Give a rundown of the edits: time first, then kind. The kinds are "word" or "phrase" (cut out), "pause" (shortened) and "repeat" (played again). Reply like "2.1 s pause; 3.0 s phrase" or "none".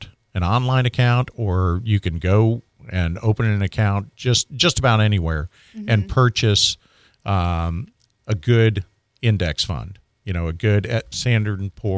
none

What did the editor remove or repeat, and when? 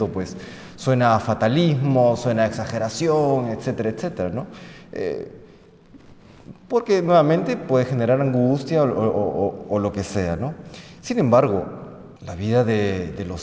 12.2 s pause

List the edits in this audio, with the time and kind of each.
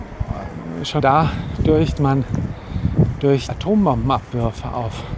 1.0 s word; 2.0 s word; 3.5 s word

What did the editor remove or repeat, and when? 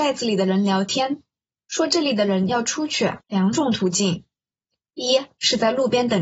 3.2 s pause

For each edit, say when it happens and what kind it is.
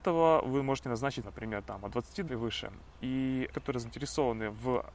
1.2 s word; 2.3 s word; 3.5 s word

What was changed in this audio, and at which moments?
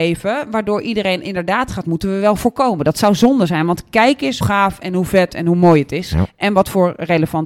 1.8 s phrase; 4.4 s word

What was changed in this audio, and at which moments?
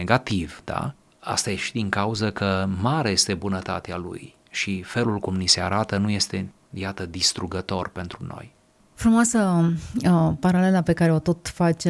none

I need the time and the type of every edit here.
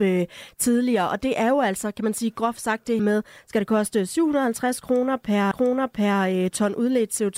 3.0 s word; 5.5 s repeat

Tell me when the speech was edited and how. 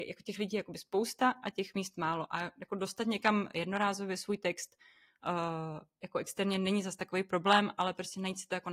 none

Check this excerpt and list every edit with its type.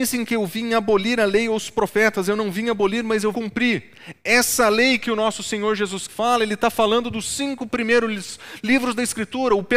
3.3 s word; 6.1 s word

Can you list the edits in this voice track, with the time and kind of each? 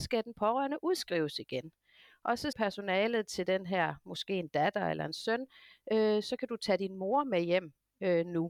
2.5 s word

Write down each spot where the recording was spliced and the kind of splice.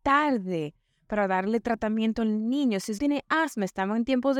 3.0 s word

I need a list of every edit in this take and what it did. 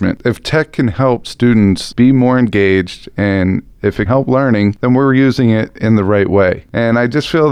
4.1 s word

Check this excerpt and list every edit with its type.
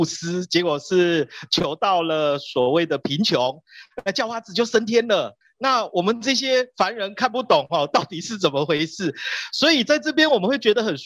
5.4 s pause

